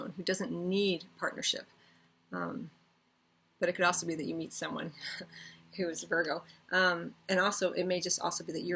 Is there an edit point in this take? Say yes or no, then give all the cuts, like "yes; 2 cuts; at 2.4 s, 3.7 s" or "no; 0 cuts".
no; 0 cuts